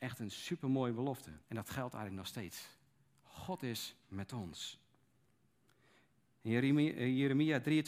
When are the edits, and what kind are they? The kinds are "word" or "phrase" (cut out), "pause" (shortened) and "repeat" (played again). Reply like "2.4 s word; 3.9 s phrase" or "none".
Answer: 1.4 s pause

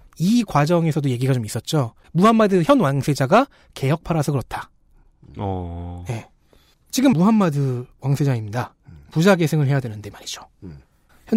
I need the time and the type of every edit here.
7.1 s phrase

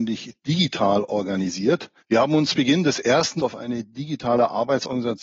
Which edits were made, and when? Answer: 2.0 s pause; 2.5 s word; 3.4 s word

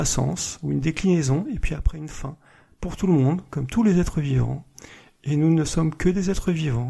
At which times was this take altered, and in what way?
none

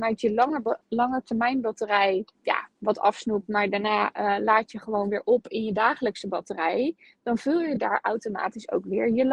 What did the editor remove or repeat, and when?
2.3 s pause

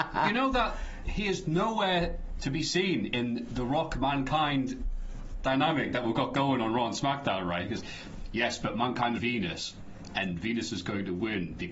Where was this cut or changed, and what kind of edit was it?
9.2 s word

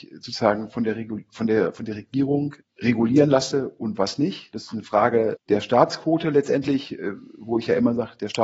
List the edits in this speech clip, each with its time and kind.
2.6 s word; 5.4 s word

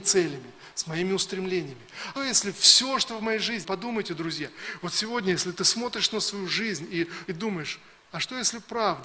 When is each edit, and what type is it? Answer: 2.2 s word; 3.6 s word; 7.3 s word

